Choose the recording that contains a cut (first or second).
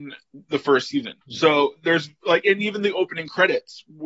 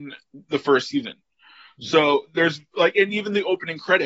first